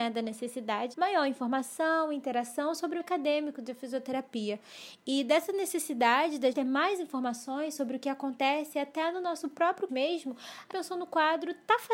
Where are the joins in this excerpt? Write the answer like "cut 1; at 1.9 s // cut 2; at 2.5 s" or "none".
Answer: cut 1; at 0.9 s // cut 2; at 3.0 s // cut 3; at 6.5 s // cut 4; at 9.9 s // cut 5; at 10.7 s